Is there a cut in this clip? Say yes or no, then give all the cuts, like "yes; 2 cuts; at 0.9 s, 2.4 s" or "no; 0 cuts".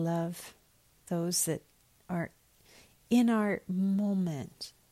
no; 0 cuts